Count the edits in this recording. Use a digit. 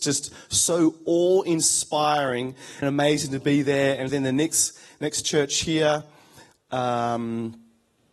2